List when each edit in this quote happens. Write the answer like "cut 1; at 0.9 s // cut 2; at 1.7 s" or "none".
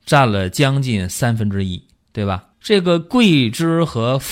cut 1; at 2.5 s